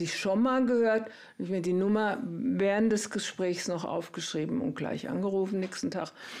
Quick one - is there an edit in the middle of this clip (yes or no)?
no